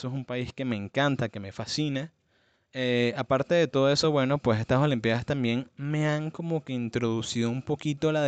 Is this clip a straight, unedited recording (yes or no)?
yes